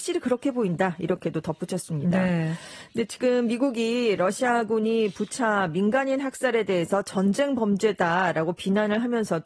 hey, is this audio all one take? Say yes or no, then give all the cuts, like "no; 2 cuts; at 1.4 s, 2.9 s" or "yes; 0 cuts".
yes; 0 cuts